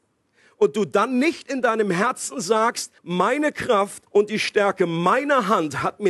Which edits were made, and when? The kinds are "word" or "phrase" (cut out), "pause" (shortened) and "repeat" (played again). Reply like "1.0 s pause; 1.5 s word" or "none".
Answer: 3.0 s pause; 4.1 s pause